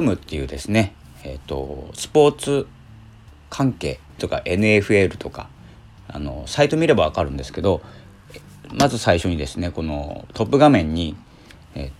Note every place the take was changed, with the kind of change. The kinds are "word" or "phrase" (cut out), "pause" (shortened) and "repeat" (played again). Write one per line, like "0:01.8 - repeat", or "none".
0:04.2 - word